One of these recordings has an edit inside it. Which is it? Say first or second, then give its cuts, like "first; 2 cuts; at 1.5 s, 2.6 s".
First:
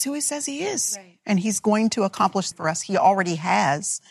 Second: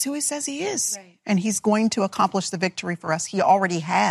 first; 1 cut; at 2.5 s